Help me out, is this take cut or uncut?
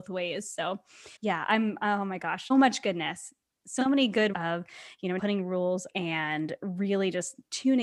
cut